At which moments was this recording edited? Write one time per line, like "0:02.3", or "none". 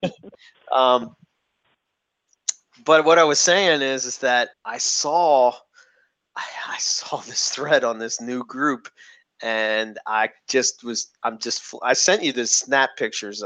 0:04.5
0:11.2